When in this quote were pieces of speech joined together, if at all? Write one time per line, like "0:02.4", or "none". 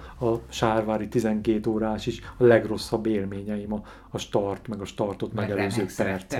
none